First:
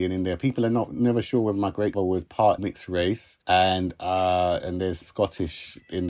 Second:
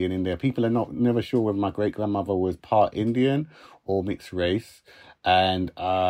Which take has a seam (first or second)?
first